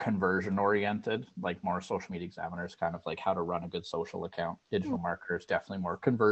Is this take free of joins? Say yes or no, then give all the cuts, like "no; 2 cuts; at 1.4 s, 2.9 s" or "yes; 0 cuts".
no; 1 cut; at 4.6 s